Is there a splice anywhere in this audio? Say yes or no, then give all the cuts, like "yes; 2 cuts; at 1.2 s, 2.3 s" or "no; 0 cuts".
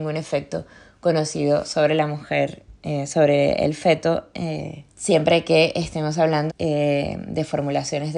yes; 2 cuts; at 4.9 s, 6.5 s